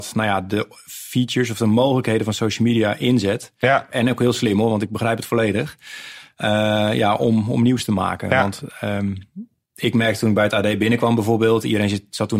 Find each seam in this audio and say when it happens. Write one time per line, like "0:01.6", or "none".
none